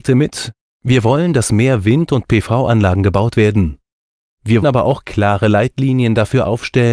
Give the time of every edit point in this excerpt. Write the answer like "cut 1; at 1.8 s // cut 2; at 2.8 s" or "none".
cut 1; at 4.6 s